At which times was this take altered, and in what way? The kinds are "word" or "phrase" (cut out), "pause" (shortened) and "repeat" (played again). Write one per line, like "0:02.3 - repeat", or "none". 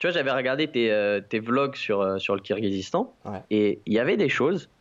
0:03.4 - pause